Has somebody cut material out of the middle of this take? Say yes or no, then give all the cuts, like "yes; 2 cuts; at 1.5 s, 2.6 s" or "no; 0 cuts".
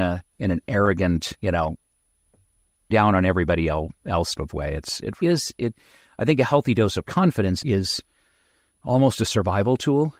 yes; 4 cuts; at 2.9 s, 4.3 s, 5.2 s, 7.6 s